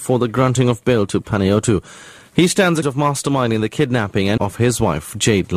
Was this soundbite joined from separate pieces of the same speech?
yes; 2 cuts; at 2.8 s, 4.4 s

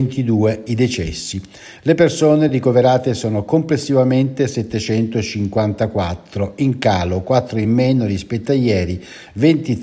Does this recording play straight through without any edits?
yes; 0 cuts

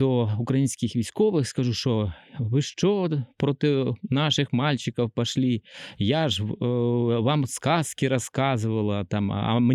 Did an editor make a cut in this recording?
no; 0 cuts

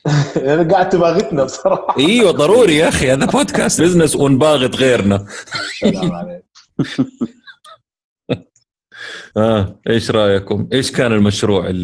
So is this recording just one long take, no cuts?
no; 2 cuts; at 3.8 s, 9.3 s

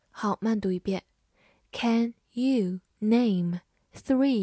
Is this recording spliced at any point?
no; 0 cuts

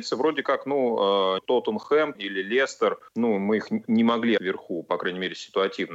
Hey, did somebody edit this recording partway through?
yes; 4 cuts; at 1.4 s, 2.1 s, 3.1 s, 4.4 s

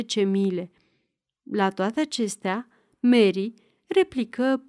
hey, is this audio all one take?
yes; 0 cuts

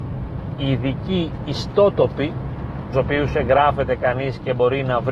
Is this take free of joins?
no; 1 cut; at 2.9 s

